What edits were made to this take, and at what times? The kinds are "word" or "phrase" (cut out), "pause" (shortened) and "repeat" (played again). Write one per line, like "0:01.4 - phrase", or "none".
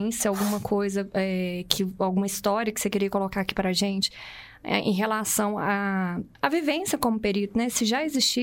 0:06.3 - pause